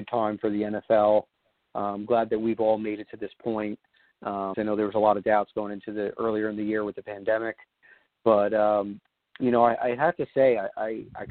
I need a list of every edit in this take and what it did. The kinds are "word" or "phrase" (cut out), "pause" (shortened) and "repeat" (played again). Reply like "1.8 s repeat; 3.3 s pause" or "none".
4.5 s word